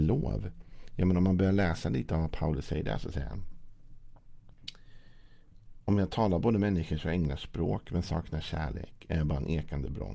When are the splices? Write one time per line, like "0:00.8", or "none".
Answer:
none